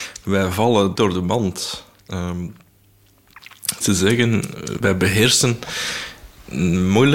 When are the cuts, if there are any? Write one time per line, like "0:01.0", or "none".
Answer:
0:01.0
0:03.8
0:04.8